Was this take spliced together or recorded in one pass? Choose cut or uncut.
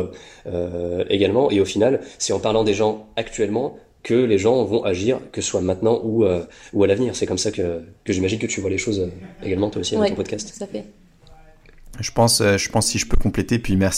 uncut